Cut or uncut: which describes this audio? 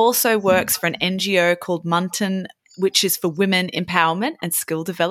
uncut